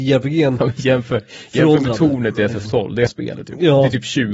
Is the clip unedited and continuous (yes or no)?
no